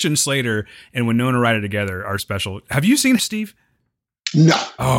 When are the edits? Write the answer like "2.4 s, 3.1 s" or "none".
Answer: 2.2 s, 3.2 s